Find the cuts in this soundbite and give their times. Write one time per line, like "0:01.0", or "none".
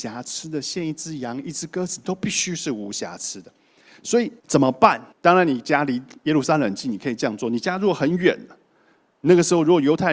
0:04.4
0:05.1